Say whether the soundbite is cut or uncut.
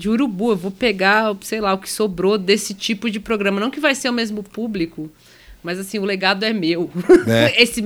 uncut